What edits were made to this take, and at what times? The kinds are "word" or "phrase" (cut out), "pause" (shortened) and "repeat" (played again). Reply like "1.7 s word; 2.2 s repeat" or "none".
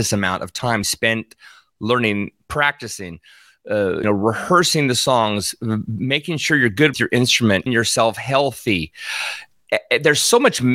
4.0 s word; 6.9 s word; 7.7 s word